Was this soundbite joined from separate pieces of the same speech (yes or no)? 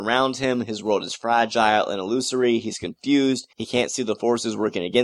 yes